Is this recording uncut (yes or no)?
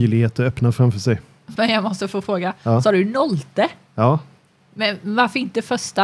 yes